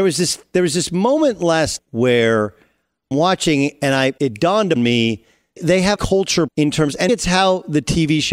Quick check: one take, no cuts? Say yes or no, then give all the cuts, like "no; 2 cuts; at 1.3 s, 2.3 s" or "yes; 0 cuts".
no; 8 cuts; at 1.8 s, 3.1 s, 4.2 s, 4.8 s, 5.6 s, 6.0 s, 6.5 s, 7.1 s